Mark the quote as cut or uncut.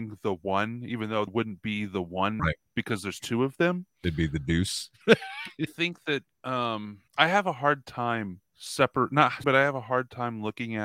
cut